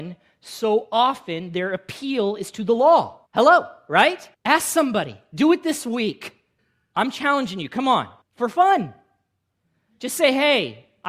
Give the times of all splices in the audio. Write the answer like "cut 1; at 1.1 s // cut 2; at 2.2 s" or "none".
cut 1; at 3.3 s // cut 2; at 4.3 s // cut 3; at 6.6 s // cut 4; at 8.2 s